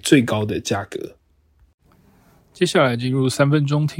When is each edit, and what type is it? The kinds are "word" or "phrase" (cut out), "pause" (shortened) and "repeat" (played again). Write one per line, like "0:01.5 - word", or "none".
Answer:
none